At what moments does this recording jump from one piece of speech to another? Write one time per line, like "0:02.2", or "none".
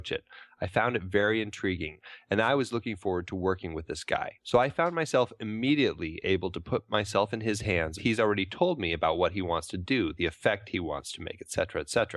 0:04.4
0:08.0